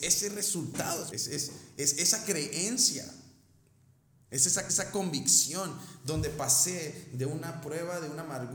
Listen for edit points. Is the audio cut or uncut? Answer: cut